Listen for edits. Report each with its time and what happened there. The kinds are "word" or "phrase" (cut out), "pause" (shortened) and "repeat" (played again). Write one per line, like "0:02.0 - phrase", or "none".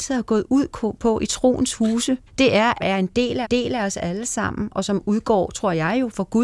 0:02.3 - pause
0:02.8 - phrase
0:03.4 - repeat